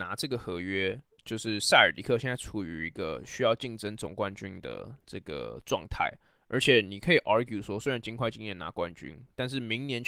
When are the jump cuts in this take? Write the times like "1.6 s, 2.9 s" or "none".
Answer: none